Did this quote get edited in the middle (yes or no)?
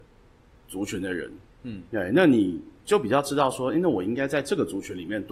yes